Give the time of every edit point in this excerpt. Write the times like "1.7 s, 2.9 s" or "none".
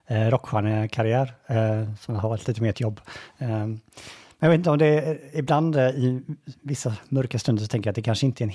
2.7 s